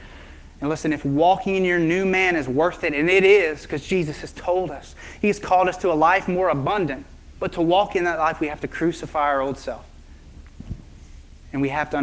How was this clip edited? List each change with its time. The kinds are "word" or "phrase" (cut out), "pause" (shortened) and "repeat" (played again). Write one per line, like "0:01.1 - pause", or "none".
0:07.4 - pause

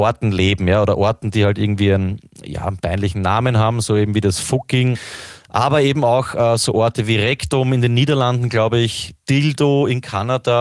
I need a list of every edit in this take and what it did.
none

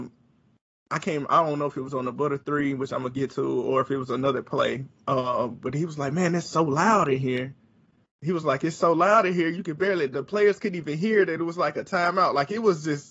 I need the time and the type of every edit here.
none

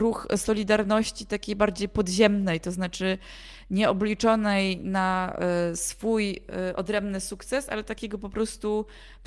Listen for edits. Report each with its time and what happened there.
none

